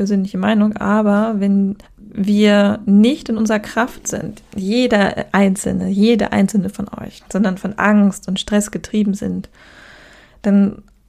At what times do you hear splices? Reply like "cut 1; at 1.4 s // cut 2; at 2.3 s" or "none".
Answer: cut 1; at 1.8 s // cut 2; at 7.2 s